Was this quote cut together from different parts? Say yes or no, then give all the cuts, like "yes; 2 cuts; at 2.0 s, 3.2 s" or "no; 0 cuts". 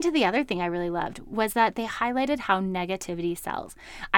no; 0 cuts